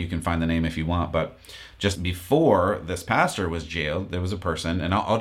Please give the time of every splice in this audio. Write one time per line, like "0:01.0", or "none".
0:01.9